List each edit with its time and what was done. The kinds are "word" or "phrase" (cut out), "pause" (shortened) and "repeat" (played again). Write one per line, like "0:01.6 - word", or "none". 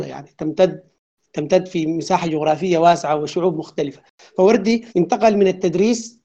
0:04.9 - pause

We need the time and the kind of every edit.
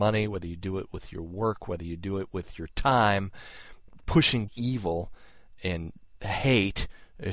0:04.5 - word
0:05.6 - word

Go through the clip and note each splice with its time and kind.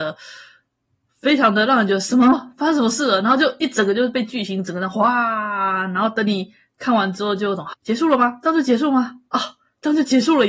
0:07.7 - word

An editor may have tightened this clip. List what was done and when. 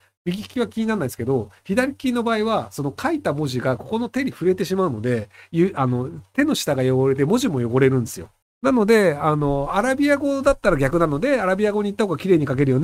0:08.4 - pause

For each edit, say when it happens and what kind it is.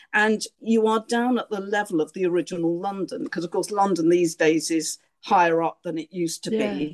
none

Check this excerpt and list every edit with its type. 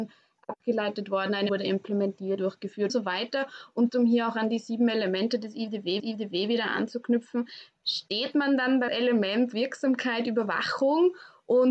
0:01.5 - word
0:02.4 - word
0:02.9 - word
0:03.9 - word
0:06.0 - repeat
0:08.9 - word

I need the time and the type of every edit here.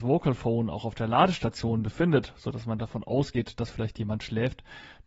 none

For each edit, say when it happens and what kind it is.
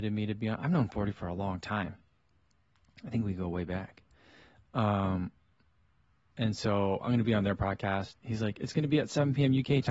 none

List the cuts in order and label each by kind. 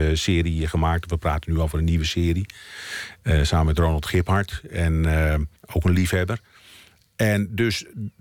0:05.6 - pause

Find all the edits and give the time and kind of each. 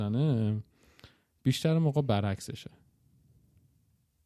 none

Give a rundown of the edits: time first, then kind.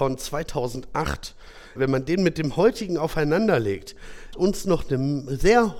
0:01.8 - word
0:04.3 - word

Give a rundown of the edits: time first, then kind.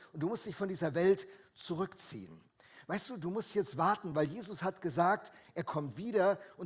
none

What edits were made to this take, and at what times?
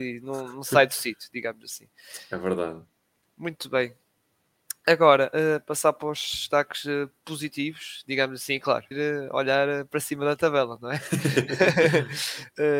0:08.9 - phrase

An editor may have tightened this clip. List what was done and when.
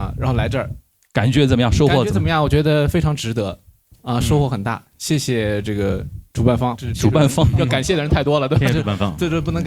0:06.8 - word

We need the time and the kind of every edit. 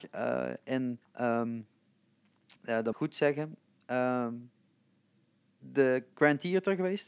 0:01.0 - pause
0:02.9 - phrase

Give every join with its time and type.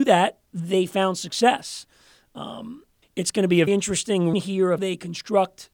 0:03.0 - word
0:03.7 - word
0:04.3 - word
0:04.8 - word

